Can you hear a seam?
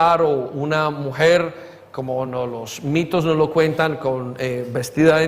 no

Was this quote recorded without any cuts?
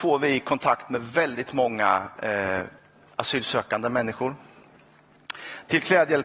yes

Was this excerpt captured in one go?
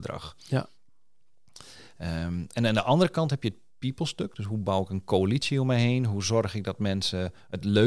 yes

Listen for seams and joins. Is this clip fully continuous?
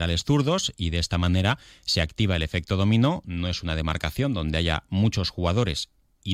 yes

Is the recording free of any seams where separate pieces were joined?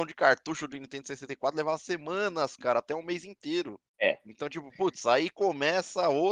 no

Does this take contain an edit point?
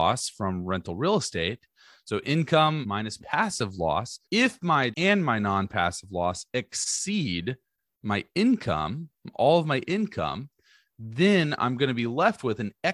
yes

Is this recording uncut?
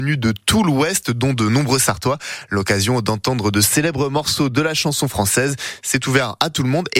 yes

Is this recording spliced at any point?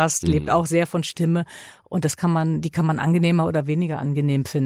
no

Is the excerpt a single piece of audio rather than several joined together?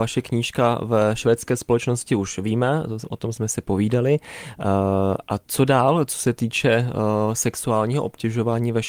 yes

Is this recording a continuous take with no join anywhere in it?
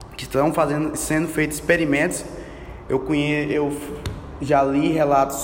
yes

